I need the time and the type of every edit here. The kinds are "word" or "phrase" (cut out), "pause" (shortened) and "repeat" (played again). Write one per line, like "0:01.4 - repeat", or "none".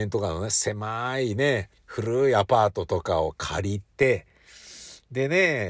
0:01.8 - pause

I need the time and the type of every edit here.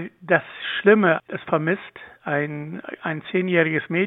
0:01.4 - phrase

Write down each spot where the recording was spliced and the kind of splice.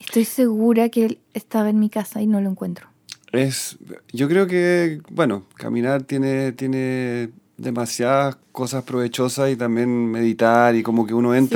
0:08.4 - pause

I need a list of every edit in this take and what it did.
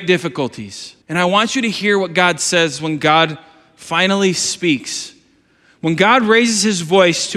0:01.0 - pause

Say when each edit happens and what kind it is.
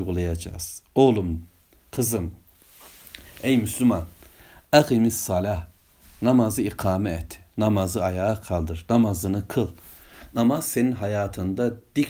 none

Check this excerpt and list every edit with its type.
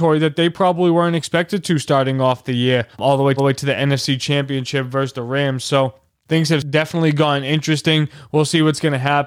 0:02.9 - pause
0:03.4 - repeat

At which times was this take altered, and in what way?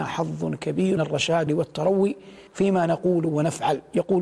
0:01.0 - word
0:01.5 - word
0:02.5 - pause

